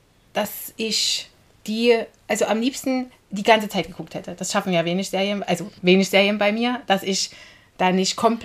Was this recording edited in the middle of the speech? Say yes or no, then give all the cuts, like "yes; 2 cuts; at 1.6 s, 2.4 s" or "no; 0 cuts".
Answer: yes; 3 cuts; at 1.4 s, 3.2 s, 5.8 s